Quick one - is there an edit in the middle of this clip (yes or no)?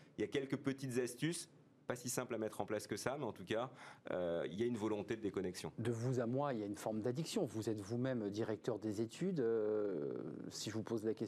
no